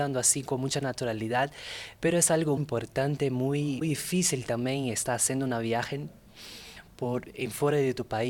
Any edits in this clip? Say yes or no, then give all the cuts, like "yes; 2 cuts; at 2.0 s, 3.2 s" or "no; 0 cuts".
yes; 2 cuts; at 2.6 s, 3.8 s